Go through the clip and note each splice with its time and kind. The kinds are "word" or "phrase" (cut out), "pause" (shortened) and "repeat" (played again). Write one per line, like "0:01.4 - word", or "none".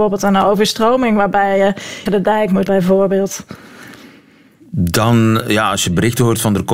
0:02.1 - phrase
0:02.7 - word